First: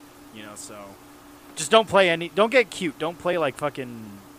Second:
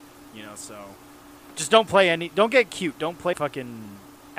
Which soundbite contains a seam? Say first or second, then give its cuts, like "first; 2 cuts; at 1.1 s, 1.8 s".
second; 1 cut; at 3.3 s